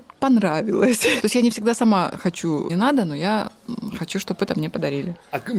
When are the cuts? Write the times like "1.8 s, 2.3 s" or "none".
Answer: 1.2 s, 2.7 s